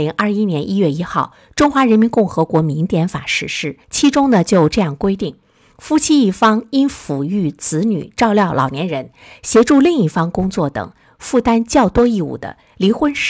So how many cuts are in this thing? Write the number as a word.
one